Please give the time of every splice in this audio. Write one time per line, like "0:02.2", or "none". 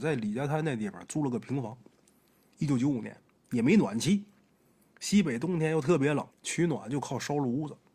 0:06.3